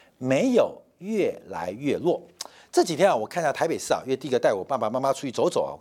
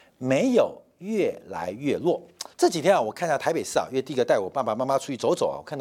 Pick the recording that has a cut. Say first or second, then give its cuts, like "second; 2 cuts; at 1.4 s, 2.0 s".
second; 1 cut; at 2.5 s